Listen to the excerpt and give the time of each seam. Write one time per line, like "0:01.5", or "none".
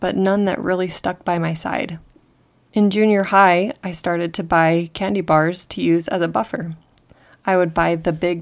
none